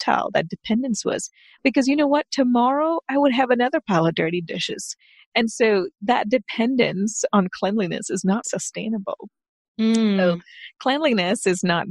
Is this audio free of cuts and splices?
no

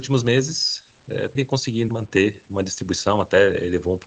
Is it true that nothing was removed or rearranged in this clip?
no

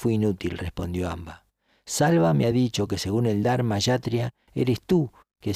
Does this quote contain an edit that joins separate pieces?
no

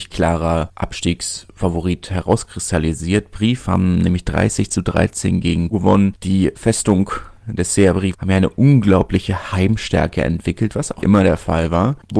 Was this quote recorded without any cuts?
no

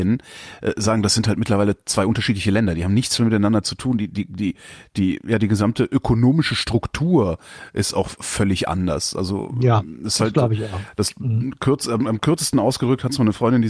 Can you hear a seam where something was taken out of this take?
no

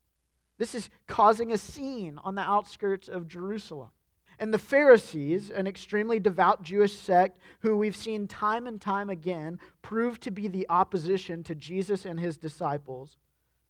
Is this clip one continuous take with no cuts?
no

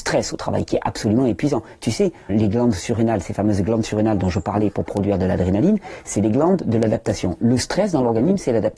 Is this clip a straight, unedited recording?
no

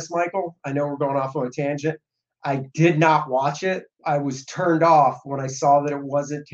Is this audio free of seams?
no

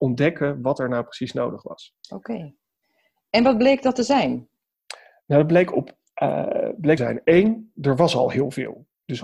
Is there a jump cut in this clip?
yes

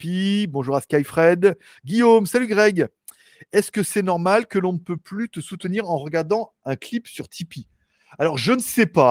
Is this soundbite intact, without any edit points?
yes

